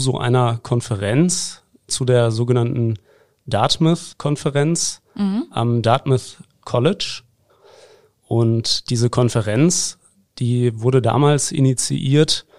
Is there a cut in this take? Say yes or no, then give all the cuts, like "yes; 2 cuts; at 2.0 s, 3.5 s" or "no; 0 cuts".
no; 0 cuts